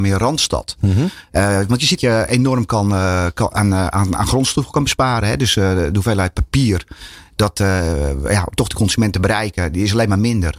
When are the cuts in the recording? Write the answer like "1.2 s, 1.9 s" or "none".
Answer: 2.0 s